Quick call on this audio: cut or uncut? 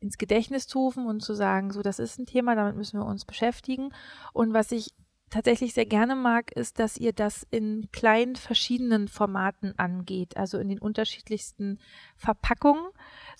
uncut